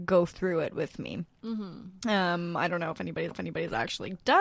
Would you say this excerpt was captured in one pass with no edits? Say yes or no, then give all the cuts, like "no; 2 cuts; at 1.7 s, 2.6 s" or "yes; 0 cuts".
no; 1 cut; at 3.3 s